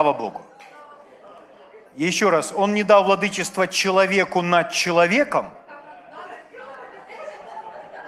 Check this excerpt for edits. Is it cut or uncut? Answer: cut